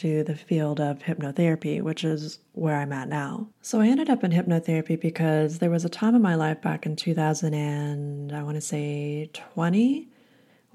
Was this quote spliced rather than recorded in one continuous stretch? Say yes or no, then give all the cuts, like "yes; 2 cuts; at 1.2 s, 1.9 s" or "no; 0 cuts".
yes; 1 cut; at 3.5 s